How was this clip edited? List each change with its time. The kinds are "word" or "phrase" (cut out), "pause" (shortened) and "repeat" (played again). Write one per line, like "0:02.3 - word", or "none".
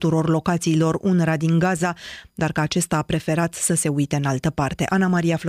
none